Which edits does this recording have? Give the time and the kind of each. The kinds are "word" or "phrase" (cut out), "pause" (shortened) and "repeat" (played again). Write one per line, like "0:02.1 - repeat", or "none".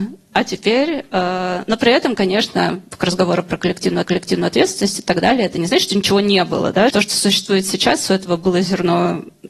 0:04.0 - repeat
0:06.9 - word